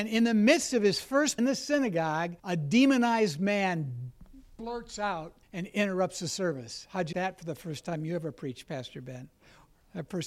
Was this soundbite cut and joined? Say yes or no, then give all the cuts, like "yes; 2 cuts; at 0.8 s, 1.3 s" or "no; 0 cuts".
yes; 4 cuts; at 1.4 s, 2.4 s, 5.4 s, 7.1 s